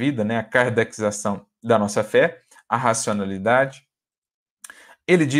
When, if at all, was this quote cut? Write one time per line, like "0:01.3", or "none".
none

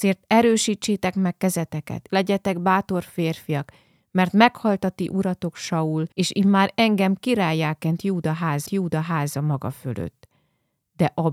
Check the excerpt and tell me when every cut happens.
0:02.1
0:06.1
0:08.7

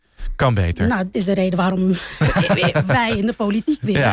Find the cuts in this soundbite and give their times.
0:01.1

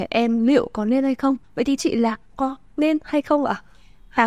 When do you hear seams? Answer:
0:01.4
0:01.8
0:02.2

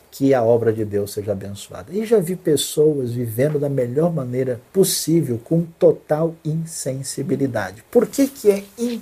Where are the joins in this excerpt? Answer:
0:04.7

